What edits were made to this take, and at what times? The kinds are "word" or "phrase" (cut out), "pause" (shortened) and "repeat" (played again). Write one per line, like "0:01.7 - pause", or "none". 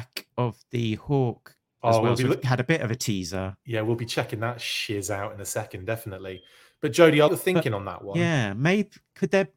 0:01.8 - word
0:07.3 - word